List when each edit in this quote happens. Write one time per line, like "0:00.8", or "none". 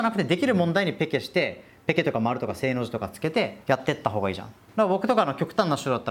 0:03.6
0:04.6